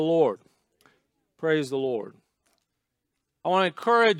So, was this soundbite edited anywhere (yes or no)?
no